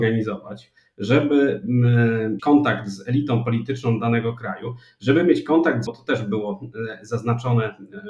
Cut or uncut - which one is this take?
cut